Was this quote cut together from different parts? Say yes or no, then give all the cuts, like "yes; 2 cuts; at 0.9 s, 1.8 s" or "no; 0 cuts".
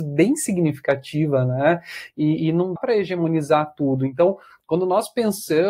yes; 1 cut; at 2.8 s